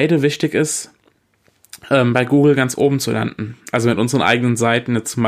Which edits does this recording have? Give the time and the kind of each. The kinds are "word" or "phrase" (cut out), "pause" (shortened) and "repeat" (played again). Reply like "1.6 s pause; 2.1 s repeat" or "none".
none

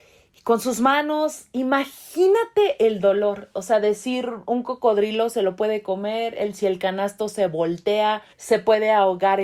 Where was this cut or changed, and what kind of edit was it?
8.3 s pause

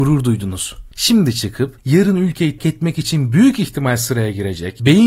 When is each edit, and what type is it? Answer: 2.6 s word

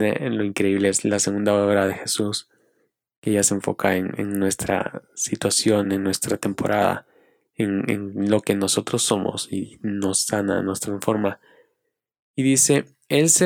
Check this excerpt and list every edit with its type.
none

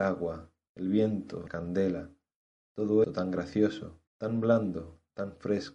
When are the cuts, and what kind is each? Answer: 1.5 s word; 3.0 s word; 4.1 s pause

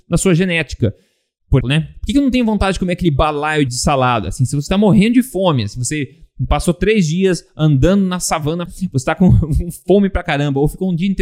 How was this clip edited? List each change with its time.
1.6 s word; 3.7 s word; 8.7 s word

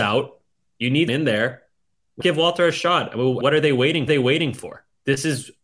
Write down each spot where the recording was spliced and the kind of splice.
1.1 s word; 2.2 s word; 3.4 s word; 4.1 s repeat

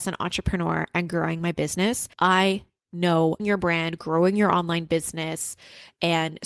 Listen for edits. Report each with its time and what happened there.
2.1 s pause; 3.4 s phrase

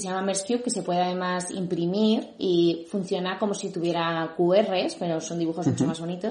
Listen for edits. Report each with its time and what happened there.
none

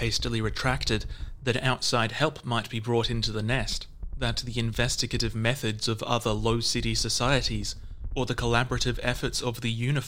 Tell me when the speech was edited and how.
none

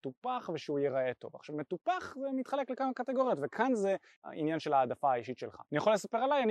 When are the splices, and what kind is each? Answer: 4.2 s word

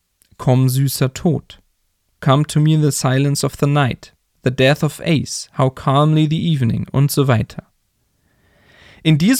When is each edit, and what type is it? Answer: none

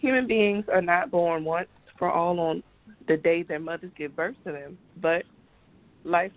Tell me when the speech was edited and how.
none

